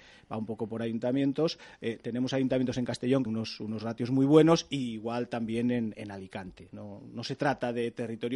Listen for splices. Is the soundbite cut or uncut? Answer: cut